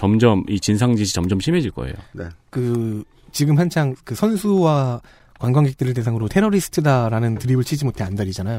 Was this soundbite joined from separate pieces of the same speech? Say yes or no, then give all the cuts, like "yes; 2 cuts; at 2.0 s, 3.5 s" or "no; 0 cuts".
yes; 1 cut; at 6.3 s